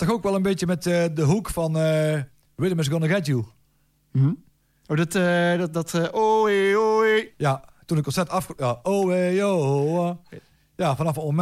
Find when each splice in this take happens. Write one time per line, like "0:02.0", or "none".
none